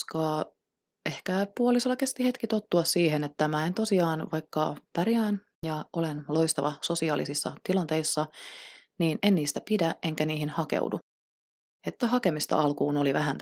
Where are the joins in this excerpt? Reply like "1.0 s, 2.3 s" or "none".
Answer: 4.9 s, 12.0 s